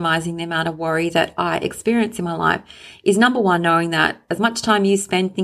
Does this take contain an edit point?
no; 0 cuts

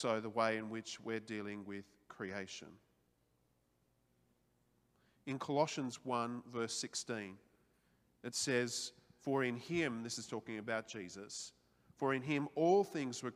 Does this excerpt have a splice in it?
no; 0 cuts

